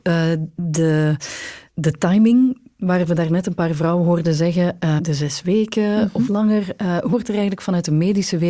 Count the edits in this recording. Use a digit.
4